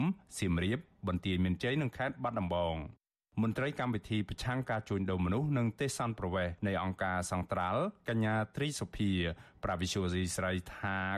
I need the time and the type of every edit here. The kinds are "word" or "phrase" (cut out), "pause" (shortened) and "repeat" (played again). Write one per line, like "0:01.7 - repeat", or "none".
0:06.6 - pause